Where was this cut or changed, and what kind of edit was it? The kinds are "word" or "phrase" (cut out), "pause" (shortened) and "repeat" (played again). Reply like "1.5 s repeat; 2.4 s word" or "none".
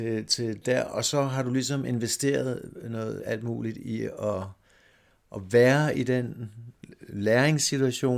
3.2 s word